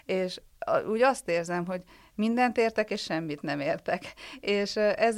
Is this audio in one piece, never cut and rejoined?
yes; 0 cuts

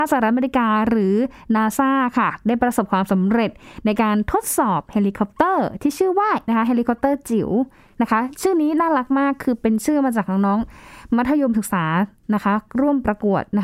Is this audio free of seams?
no; 1 cut; at 6.5 s

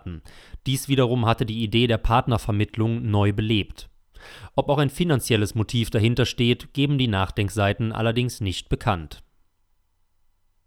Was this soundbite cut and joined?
no; 0 cuts

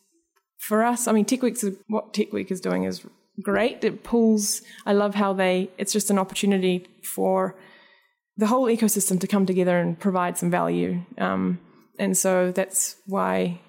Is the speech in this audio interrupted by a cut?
yes; 1 cut; at 1.8 s

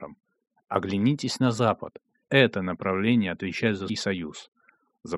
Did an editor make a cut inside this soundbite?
yes; 2 cuts; at 2.3 s, 3.9 s

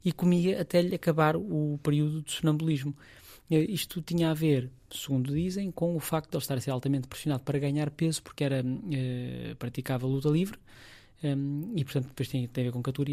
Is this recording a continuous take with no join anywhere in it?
yes; 0 cuts

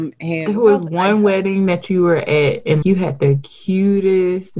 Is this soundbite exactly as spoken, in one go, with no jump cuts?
no; 1 cut; at 2.8 s

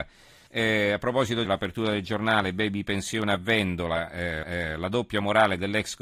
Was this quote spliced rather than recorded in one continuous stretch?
yes; 2 cuts; at 1.4 s, 4.4 s

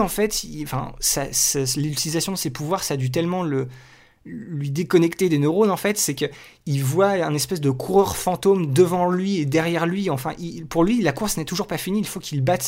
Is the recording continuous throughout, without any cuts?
yes; 0 cuts

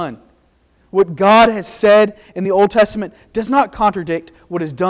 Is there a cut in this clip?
no; 0 cuts

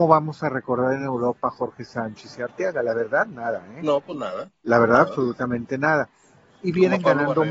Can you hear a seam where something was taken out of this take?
no; 0 cuts

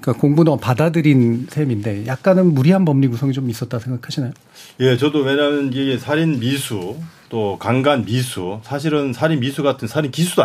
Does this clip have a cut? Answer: no; 0 cuts

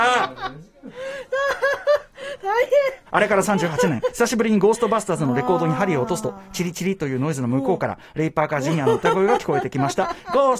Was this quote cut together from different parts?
yes; 1 cut; at 3.1 s

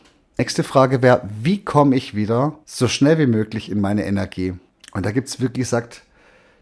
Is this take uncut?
no; 2 cuts; at 2.6 s, 4.7 s

